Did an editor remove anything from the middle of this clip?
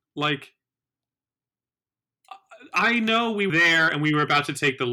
yes; 1 cut; at 3.5 s

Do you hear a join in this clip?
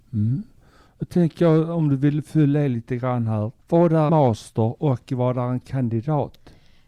yes; 2 cuts; at 3.6 s, 4.1 s

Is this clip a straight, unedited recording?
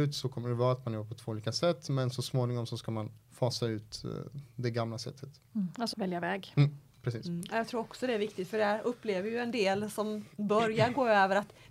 no; 2 cuts; at 3.2 s, 5.9 s

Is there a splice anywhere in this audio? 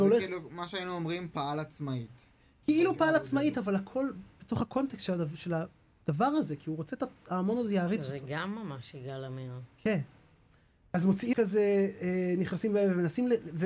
yes; 1 cut; at 11.3 s

